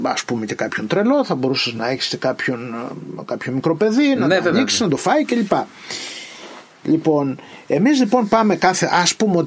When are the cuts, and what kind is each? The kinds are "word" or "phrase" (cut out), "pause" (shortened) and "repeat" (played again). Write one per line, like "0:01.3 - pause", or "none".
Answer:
none